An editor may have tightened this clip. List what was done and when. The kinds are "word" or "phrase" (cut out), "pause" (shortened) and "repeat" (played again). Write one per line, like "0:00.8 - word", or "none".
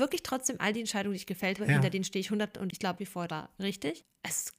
0:01.6 - word
0:02.5 - word
0:03.0 - word
0:03.3 - word